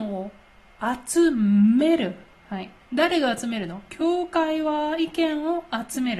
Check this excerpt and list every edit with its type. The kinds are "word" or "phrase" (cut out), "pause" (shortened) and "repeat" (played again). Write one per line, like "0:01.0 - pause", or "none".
0:02.8 - pause